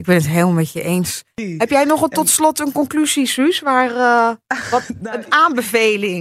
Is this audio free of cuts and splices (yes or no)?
yes